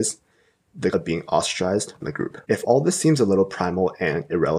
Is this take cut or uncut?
cut